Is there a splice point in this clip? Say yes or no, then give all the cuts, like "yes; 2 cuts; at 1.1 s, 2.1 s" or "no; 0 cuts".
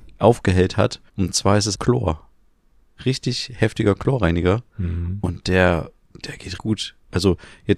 yes; 3 cuts; at 1.1 s, 1.7 s, 6.6 s